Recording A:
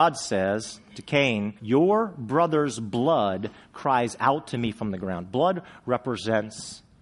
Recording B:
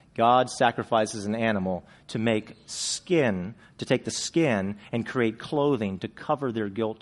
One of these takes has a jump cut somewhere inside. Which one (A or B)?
A